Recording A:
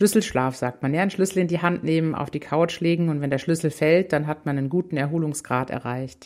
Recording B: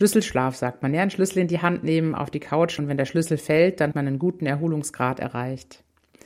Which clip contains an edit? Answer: B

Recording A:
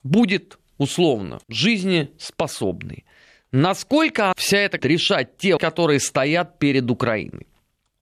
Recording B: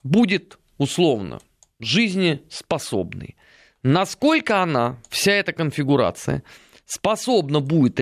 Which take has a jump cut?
A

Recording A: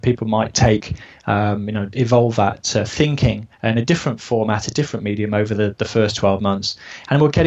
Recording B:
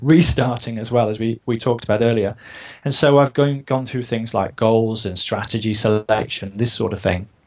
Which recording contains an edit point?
A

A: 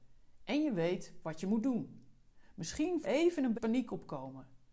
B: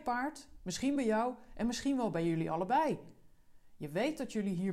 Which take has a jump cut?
A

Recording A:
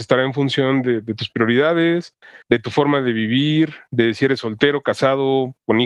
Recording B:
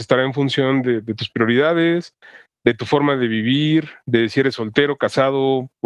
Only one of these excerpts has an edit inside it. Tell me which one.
A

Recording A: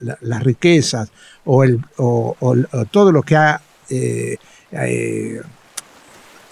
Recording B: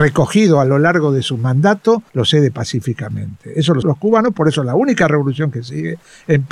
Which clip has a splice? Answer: B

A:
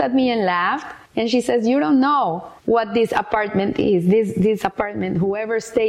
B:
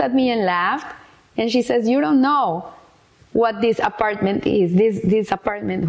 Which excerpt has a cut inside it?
A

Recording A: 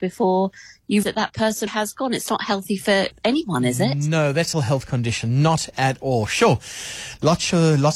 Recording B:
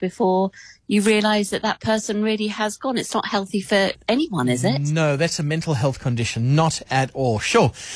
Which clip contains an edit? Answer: A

